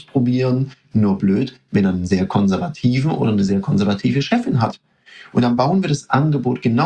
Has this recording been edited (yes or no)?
no